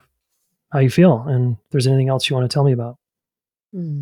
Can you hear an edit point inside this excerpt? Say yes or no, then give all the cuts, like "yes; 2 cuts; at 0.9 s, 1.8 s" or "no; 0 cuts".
no; 0 cuts